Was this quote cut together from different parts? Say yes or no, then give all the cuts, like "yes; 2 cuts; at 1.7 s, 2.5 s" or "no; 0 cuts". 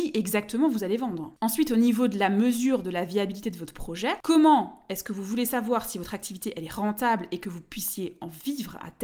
no; 0 cuts